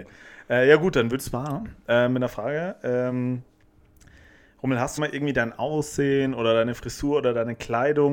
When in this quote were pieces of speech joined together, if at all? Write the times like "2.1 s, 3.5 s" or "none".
1.2 s, 5.0 s